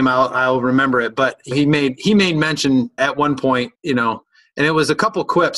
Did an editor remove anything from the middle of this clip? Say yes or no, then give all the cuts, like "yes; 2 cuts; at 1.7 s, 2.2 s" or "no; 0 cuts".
yes; 3 cuts; at 1.5 s, 3.0 s, 3.7 s